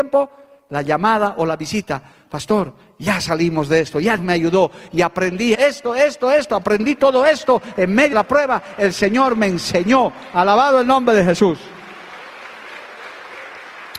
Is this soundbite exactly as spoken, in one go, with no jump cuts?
no; 3 cuts; at 4.2 s, 5.5 s, 8.1 s

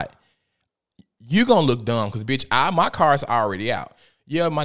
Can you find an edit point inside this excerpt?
no; 0 cuts

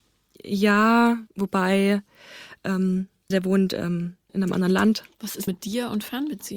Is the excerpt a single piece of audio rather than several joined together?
no; 4 cuts; at 1.3 s, 3.3 s, 4.3 s, 5.5 s

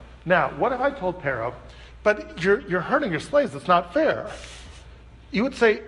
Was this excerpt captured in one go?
yes; 0 cuts

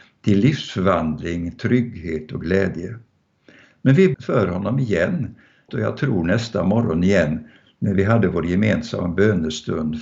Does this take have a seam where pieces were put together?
yes; 2 cuts; at 4.1 s, 5.7 s

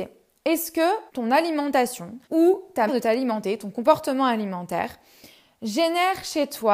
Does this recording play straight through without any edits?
no; 3 cuts; at 1.1 s, 2.2 s, 2.9 s

